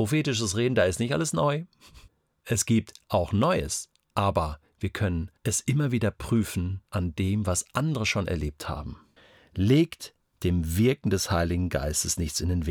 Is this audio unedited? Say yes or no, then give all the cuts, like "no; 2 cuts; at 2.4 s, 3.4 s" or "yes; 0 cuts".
no; 4 cuts; at 2.1 s, 5.4 s, 6.8 s, 9.2 s